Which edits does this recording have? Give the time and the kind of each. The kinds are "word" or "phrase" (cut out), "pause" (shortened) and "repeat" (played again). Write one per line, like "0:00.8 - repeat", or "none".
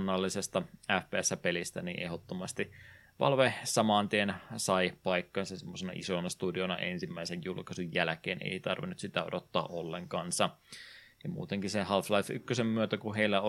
none